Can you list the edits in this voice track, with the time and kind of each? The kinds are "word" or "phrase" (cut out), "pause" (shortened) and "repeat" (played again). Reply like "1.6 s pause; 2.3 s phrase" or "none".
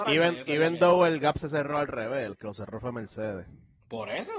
2.3 s word